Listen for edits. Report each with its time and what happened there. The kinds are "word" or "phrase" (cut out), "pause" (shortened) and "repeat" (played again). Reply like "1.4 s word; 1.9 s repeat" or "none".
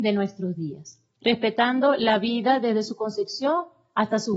1.1 s pause